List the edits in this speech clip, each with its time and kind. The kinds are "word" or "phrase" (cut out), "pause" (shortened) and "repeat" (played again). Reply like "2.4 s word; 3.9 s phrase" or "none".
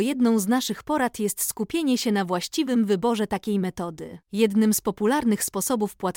4.2 s pause